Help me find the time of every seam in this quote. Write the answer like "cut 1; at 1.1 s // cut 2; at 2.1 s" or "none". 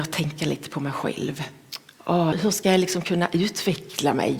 cut 1; at 2.3 s